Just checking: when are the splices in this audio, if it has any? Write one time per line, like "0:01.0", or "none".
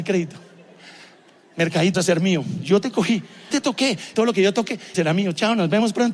0:01.9
0:03.5
0:04.1
0:04.9